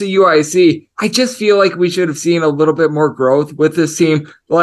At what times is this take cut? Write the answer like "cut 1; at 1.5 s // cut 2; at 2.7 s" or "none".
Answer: cut 1; at 0.9 s